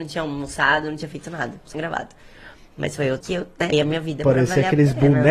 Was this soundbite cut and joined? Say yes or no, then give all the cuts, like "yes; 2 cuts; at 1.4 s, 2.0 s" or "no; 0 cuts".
yes; 3 cuts; at 1.7 s, 3.2 s, 3.7 s